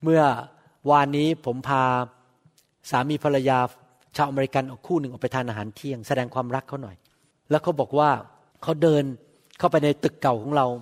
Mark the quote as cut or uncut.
uncut